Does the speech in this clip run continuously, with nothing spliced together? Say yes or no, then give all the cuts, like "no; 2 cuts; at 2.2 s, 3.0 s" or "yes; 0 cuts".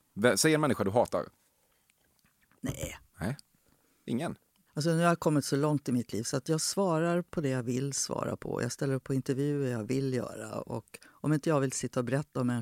no; 1 cut; at 3.1 s